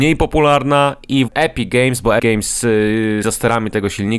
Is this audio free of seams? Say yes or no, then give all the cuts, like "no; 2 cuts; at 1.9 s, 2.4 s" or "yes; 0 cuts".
no; 3 cuts; at 1.3 s, 2.2 s, 3.2 s